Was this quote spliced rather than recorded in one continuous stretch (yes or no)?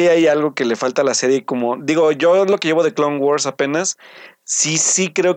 no